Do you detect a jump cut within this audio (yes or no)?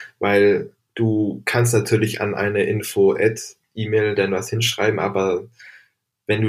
no